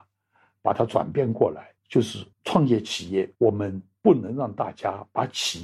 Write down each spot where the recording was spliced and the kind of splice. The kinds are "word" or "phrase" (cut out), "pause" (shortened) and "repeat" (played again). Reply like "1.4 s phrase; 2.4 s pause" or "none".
1.8 s pause; 2.3 s pause; 3.3 s pause